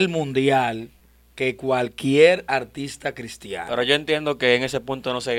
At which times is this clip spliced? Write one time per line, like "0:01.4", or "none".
none